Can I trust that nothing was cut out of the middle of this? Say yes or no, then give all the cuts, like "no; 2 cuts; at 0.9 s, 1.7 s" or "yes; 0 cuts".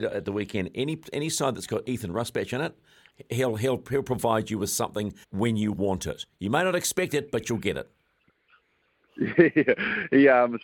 no; 1 cut; at 5.2 s